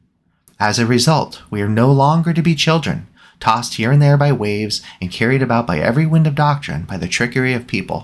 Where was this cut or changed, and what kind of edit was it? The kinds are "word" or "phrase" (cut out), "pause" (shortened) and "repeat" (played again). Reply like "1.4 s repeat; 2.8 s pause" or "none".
none